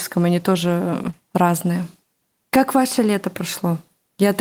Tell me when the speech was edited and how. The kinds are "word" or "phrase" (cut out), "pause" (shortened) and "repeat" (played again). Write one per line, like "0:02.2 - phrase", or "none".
none